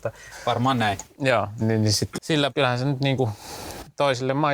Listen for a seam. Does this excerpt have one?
yes; 3 cuts; at 1.6 s, 2.2 s, 2.5 s

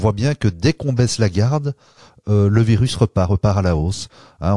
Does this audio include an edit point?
no; 0 cuts

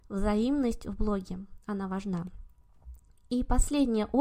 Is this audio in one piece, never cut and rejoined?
yes; 0 cuts

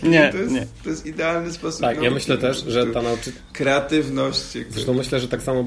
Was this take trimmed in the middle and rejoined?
no; 0 cuts

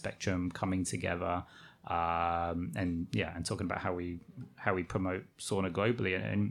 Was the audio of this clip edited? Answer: no; 0 cuts

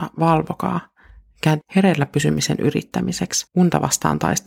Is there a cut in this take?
yes; 2 cuts; at 1.6 s, 3.5 s

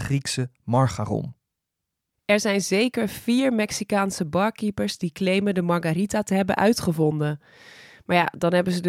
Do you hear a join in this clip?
no; 0 cuts

